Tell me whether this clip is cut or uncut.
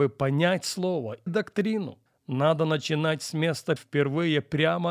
cut